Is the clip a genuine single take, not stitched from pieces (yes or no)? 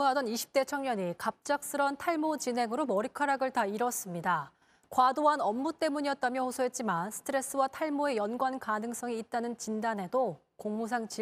yes